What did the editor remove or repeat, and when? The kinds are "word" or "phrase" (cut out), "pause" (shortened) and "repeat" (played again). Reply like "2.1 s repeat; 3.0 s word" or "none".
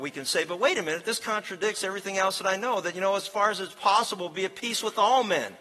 none